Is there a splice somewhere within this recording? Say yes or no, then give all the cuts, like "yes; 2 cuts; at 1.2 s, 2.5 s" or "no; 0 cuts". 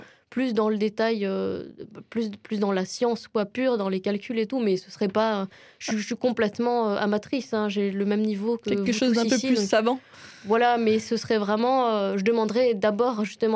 no; 0 cuts